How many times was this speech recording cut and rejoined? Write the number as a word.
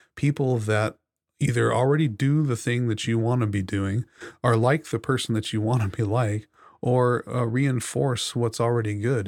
zero